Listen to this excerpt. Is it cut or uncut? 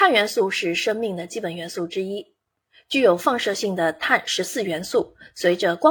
uncut